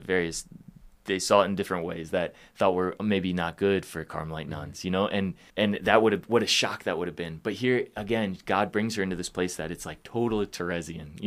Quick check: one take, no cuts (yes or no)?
no